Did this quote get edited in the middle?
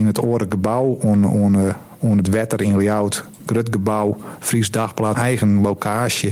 yes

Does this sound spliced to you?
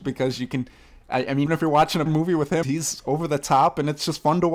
yes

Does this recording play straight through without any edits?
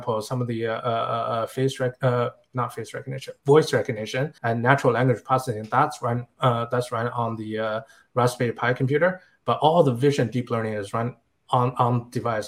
no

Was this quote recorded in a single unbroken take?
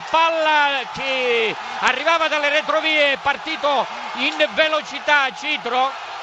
yes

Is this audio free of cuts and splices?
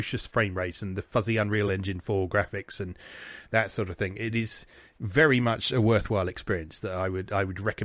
yes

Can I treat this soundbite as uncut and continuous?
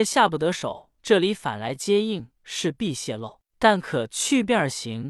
no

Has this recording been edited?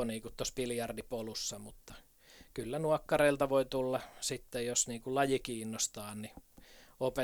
no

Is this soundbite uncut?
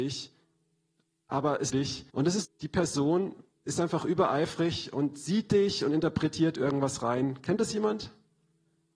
no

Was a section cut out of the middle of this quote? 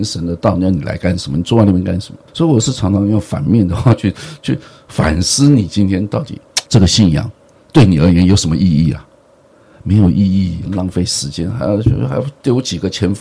yes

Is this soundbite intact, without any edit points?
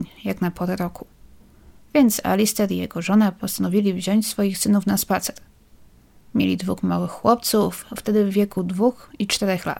yes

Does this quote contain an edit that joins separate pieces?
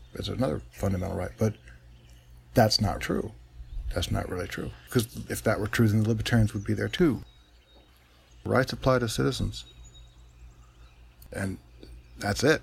yes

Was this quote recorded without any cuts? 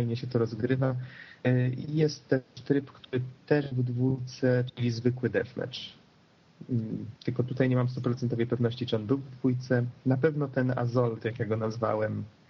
no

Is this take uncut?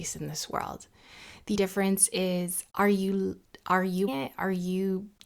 no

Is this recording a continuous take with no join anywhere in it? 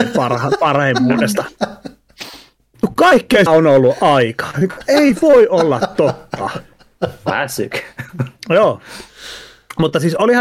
no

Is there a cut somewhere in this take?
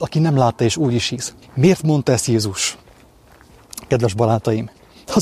yes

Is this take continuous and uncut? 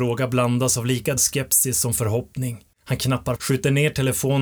no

